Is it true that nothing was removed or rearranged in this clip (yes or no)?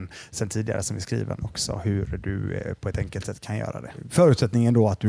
yes